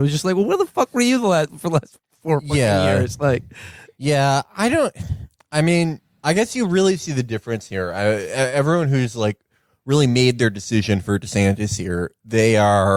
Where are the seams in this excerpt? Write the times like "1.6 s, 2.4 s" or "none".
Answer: none